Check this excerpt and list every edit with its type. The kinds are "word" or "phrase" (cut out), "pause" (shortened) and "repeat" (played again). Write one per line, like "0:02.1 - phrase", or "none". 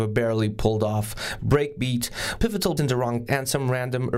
0:01.4 - word
0:02.4 - word
0:02.8 - word
0:03.3 - word